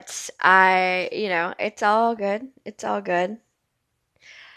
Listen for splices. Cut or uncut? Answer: uncut